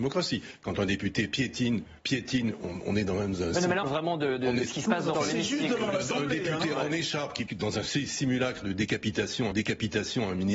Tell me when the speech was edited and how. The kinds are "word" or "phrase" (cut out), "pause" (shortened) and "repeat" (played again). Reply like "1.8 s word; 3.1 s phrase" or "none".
2.0 s pause; 3.8 s phrase; 5.1 s word; 7.5 s word; 9.5 s repeat